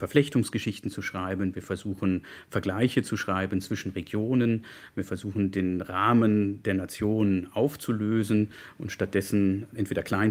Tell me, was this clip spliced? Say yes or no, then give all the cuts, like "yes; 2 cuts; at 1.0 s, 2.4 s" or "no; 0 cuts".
no; 0 cuts